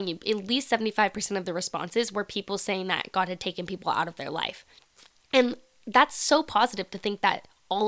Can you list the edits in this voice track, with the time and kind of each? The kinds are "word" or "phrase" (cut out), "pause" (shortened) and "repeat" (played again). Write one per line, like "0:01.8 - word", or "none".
none